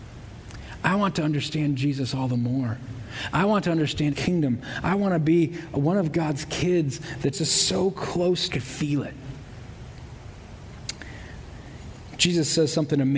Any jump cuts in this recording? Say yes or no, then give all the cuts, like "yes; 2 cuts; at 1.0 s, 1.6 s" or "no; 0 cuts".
yes; 3 cuts; at 4.1 s, 7.3 s, 8.5 s